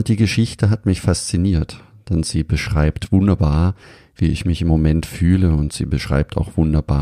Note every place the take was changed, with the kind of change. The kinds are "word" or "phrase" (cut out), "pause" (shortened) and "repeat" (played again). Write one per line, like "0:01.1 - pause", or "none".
none